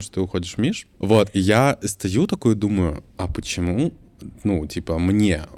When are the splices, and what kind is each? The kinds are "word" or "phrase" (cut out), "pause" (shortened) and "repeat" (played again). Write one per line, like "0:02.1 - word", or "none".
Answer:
0:00.9 - pause
0:03.1 - pause